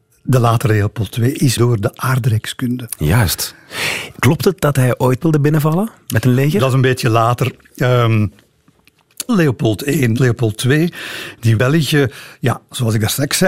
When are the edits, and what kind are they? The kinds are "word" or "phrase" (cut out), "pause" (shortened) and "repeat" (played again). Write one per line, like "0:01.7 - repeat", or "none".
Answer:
0:01.6 - word
0:05.2 - word
0:09.3 - word
0:10.2 - word
0:11.6 - word